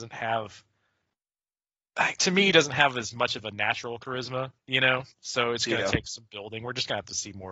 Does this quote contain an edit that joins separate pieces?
yes; 2 cuts; at 4.6 s, 5.1 s

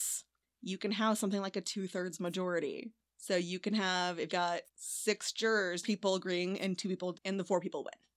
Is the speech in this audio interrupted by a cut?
yes; 4 cuts; at 4.3 s, 4.7 s, 5.8 s, 7.1 s

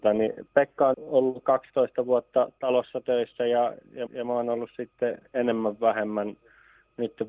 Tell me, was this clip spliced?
yes; 3 cuts; at 0.9 s, 1.4 s, 4.1 s

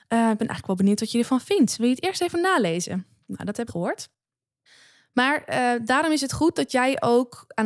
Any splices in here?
yes; 1 cut; at 3.7 s

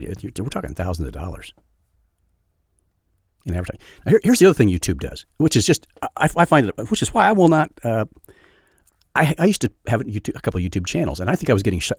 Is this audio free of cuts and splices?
yes; 0 cuts

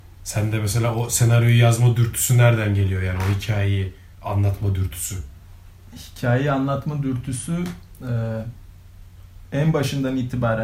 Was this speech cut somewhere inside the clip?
yes; 1 cut; at 4.1 s

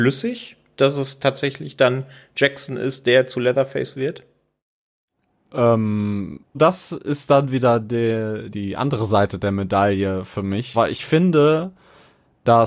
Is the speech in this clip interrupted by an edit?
yes; 3 cuts; at 6.5 s, 8.5 s, 10.7 s

